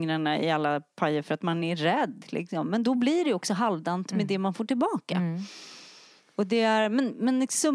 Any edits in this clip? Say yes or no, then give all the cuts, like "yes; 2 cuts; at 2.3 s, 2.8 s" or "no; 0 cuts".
no; 0 cuts